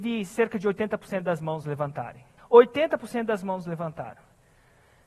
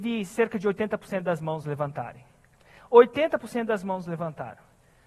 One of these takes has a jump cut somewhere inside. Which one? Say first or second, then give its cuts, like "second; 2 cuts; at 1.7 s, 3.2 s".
first; 1 cut; at 2.4 s